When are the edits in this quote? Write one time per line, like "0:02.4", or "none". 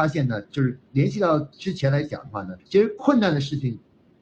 0:02.6